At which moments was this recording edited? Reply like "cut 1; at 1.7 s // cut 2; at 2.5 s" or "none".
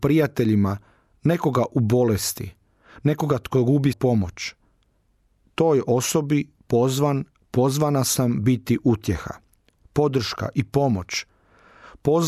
cut 1; at 3.9 s